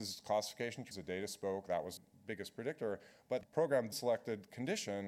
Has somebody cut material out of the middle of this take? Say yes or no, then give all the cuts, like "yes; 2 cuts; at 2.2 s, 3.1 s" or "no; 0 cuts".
yes; 3 cuts; at 0.9 s, 2.0 s, 3.9 s